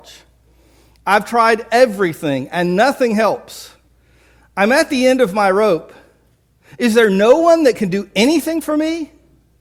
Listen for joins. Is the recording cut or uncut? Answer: uncut